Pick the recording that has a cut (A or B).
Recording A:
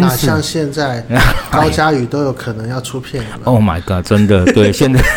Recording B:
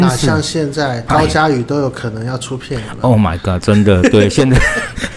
B